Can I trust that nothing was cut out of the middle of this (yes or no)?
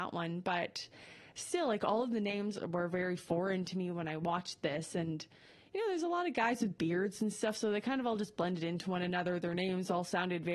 yes